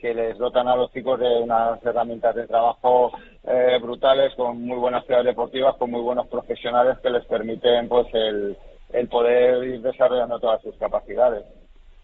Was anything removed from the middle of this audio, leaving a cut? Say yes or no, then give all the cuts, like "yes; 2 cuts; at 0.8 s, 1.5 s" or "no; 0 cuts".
no; 0 cuts